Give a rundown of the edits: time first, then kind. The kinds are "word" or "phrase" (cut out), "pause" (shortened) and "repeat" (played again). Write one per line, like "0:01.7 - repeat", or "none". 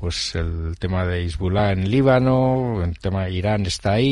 none